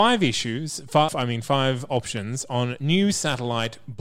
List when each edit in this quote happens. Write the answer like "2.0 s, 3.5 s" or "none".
1.1 s